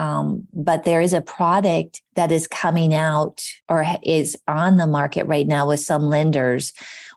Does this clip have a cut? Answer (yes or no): yes